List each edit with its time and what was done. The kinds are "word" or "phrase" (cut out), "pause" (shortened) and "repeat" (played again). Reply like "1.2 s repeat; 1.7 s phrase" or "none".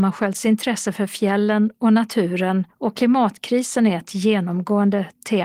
2.7 s pause